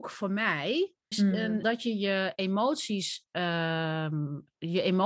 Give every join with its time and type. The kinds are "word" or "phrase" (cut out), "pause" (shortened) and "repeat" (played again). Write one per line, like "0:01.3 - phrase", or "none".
0:01.1 - word
0:01.6 - word